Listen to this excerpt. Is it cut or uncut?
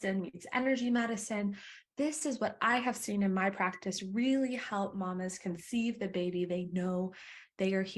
uncut